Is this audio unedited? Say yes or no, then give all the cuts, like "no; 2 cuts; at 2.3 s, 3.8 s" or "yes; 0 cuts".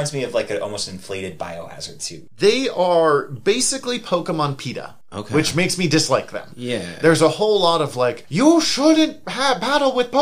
yes; 0 cuts